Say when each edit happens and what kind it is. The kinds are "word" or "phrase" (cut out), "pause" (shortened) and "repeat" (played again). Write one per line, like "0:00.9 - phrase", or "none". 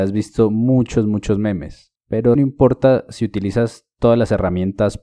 0:02.3 - word